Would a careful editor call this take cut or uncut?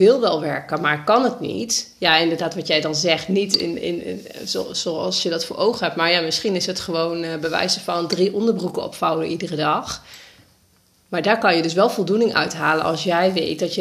uncut